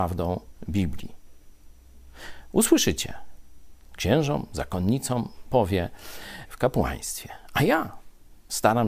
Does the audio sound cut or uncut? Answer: cut